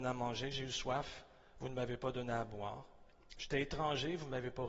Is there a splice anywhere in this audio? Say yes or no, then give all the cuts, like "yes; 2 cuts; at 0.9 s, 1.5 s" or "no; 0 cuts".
no; 0 cuts